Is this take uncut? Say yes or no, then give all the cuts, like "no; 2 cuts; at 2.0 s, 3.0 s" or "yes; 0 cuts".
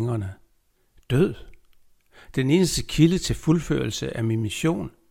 yes; 0 cuts